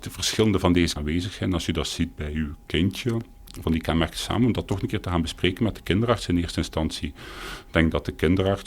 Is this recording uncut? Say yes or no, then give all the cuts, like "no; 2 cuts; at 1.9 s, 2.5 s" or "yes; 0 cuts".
no; 2 cuts; at 1.0 s, 3.6 s